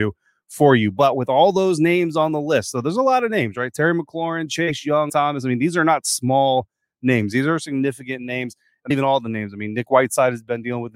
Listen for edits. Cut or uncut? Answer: cut